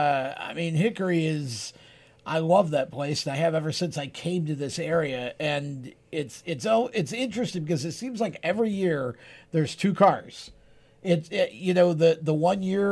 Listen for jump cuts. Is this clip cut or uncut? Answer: uncut